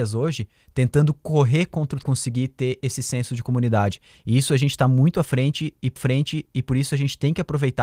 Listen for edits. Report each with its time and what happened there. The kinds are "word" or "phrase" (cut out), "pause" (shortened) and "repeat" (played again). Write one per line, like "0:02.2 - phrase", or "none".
0:02.0 - phrase
0:06.0 - repeat